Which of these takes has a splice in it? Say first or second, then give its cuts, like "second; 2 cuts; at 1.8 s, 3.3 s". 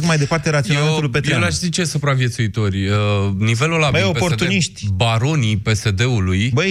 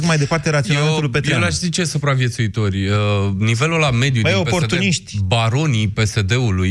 first; 1 cut; at 3.9 s